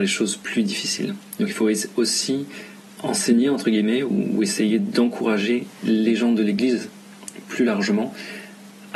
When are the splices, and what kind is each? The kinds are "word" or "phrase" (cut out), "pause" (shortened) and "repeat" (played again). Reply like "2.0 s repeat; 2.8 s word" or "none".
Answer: none